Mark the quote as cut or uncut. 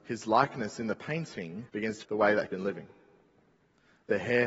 cut